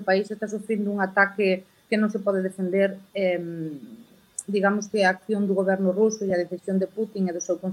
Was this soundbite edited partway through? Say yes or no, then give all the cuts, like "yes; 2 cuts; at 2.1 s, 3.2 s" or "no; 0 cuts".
no; 0 cuts